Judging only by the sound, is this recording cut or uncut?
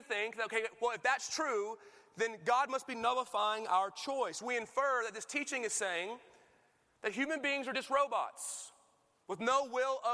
uncut